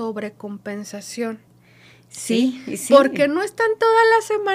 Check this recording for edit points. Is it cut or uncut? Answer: uncut